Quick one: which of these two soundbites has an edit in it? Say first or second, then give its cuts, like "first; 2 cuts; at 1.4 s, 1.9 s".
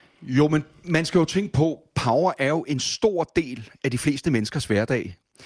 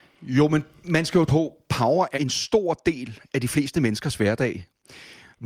second; 2 cuts; at 1.3 s, 2.1 s